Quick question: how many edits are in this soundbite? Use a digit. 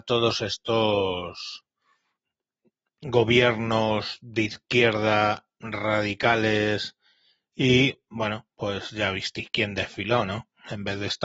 0